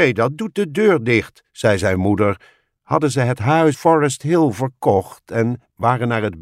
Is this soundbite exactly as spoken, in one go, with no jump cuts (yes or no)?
no